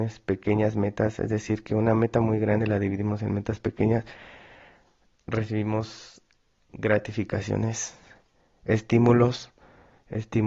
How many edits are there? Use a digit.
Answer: 1